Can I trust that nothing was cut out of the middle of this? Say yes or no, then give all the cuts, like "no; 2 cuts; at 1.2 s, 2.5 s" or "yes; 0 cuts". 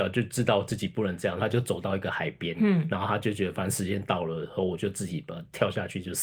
yes; 0 cuts